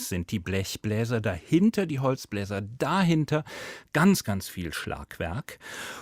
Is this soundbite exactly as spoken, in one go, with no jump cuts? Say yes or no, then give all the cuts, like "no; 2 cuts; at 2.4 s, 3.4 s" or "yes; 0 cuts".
yes; 0 cuts